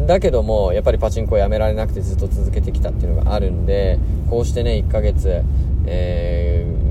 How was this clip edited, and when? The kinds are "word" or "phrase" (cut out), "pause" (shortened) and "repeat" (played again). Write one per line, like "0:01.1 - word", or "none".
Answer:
0:04.2 - phrase